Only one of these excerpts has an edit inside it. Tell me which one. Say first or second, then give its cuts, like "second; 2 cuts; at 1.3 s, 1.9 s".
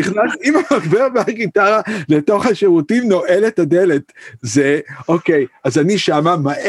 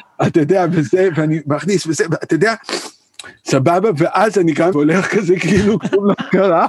second; 1 cut; at 4.7 s